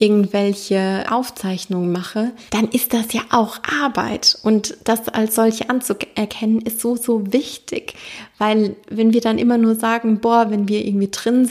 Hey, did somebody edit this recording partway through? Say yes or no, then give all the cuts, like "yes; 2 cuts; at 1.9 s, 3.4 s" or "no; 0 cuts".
yes; 2 cuts; at 1.0 s, 2.5 s